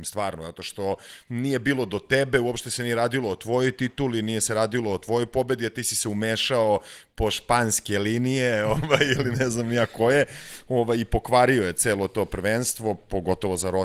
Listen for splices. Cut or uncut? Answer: uncut